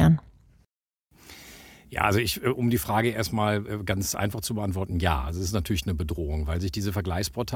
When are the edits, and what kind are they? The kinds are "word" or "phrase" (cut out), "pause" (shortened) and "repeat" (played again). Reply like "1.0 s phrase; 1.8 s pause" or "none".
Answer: none